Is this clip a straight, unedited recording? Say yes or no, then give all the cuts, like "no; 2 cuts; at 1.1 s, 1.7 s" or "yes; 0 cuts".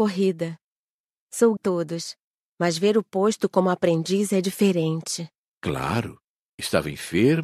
no; 1 cut; at 1.6 s